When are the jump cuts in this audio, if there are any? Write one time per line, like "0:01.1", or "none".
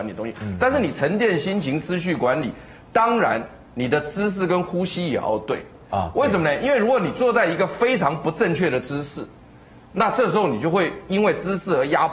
none